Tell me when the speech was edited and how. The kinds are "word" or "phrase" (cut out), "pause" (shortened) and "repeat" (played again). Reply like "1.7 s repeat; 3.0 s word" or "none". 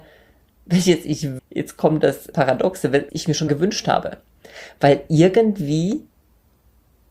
1.4 s word; 2.3 s word; 3.1 s word; 3.5 s word